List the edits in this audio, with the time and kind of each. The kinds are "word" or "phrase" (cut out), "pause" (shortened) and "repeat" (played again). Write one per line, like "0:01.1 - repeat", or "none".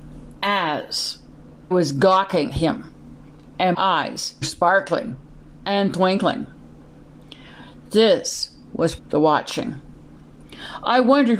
0:01.7 - word
0:02.5 - word
0:03.7 - word
0:04.4 - word
0:09.0 - word

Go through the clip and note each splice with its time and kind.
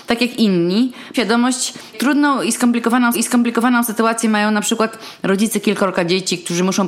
0:01.1 - word
0:01.9 - word
0:03.1 - repeat

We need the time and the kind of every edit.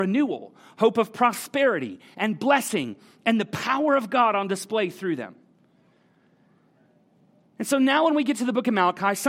none

